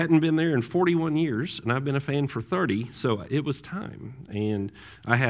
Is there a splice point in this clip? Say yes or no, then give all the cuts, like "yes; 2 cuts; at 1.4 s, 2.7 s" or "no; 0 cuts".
no; 0 cuts